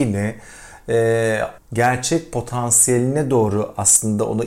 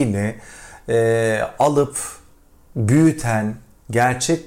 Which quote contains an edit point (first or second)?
first